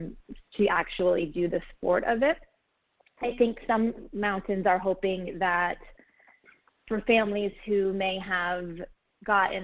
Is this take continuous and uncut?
yes; 0 cuts

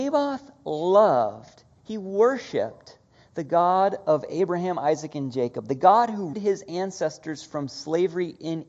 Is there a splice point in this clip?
yes; 1 cut; at 6.3 s

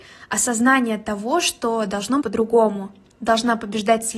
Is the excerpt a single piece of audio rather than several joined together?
no; 1 cut; at 2.2 s

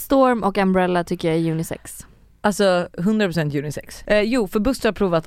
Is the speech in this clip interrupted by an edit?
no; 0 cuts

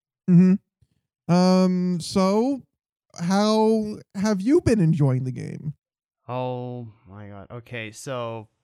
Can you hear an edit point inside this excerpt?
no; 0 cuts

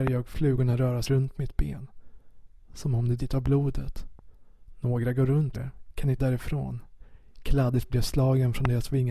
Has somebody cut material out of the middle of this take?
yes; 5 cuts; at 1.0 s, 3.2 s, 5.5 s, 6.2 s, 7.9 s

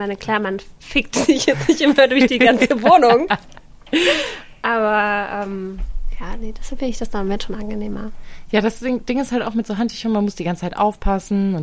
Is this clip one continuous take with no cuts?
yes; 0 cuts

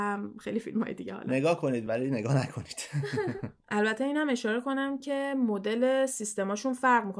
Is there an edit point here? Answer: no; 0 cuts

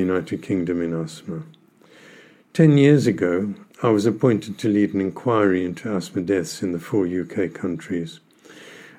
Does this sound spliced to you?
no; 0 cuts

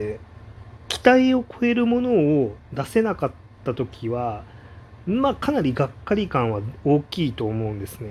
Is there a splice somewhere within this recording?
no; 0 cuts

